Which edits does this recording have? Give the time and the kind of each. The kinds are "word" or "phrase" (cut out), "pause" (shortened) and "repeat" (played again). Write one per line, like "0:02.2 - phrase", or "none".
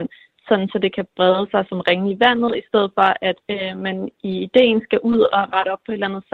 0:03.4 - pause